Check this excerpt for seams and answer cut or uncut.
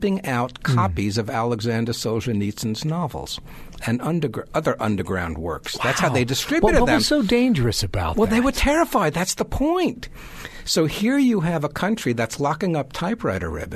uncut